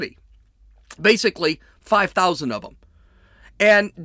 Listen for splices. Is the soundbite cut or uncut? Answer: uncut